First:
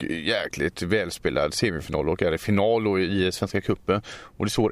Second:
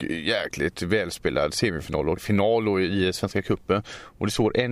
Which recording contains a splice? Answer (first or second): second